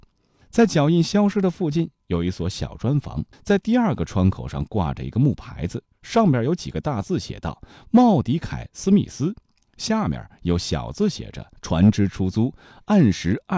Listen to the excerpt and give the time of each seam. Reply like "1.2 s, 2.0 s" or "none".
3.3 s